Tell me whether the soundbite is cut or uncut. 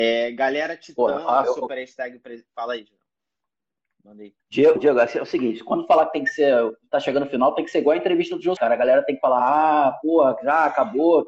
cut